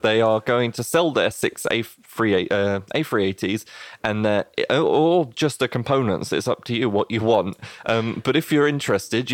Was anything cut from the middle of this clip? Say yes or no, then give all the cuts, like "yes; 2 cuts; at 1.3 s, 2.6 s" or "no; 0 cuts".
no; 0 cuts